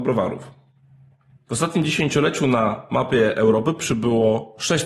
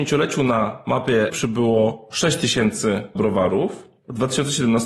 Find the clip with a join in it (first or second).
second